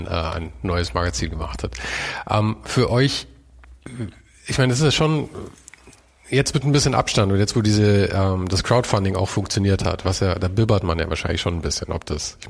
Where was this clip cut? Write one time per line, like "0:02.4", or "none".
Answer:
none